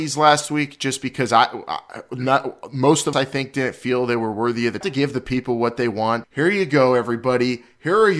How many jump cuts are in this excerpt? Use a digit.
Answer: 3